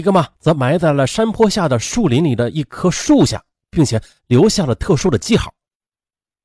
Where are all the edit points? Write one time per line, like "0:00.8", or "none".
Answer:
none